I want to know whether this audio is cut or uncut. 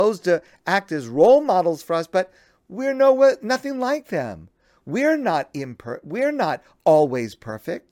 uncut